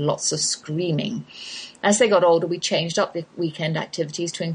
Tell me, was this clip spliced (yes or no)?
no